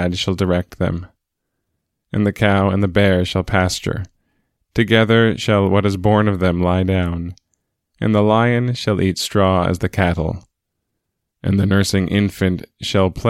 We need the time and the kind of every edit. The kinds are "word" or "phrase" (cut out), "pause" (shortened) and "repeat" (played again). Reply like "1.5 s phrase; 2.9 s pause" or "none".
none